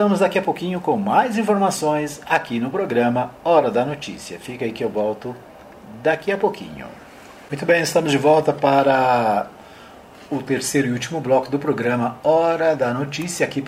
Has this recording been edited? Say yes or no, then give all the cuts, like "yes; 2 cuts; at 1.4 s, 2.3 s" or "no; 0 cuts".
no; 0 cuts